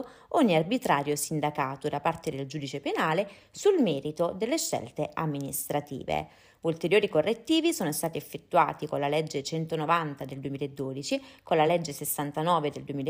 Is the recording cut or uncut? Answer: uncut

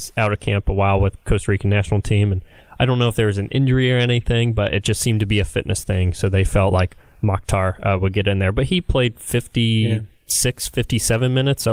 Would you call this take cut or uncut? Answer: uncut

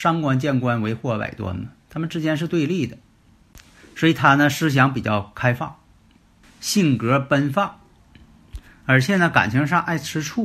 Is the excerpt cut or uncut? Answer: uncut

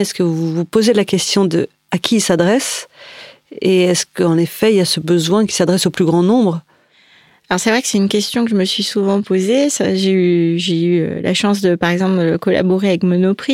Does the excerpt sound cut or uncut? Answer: uncut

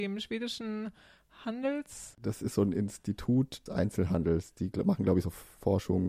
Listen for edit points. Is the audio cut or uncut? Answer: cut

